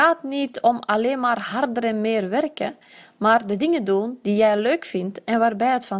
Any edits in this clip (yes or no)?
no